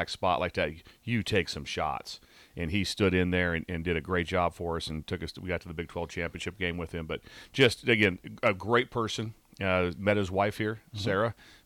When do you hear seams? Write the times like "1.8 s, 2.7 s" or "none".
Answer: none